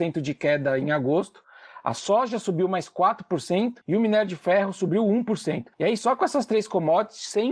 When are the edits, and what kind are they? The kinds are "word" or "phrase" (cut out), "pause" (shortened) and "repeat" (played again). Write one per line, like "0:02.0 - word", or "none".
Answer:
0:03.8 - pause
0:05.7 - pause